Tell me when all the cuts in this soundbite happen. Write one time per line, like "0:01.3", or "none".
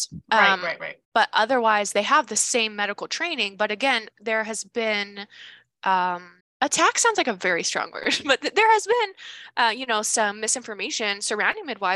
0:01.0
0:06.4